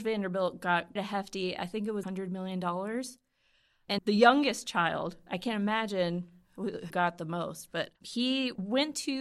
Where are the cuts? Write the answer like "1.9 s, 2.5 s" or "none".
1.0 s, 2.0 s, 4.0 s, 6.9 s, 8.0 s